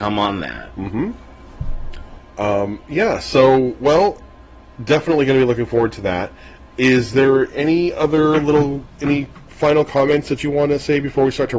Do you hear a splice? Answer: no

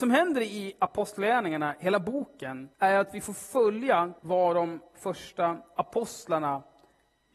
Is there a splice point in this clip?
yes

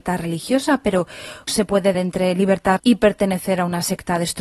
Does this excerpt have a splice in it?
yes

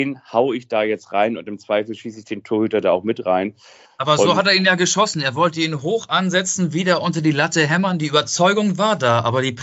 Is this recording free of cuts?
yes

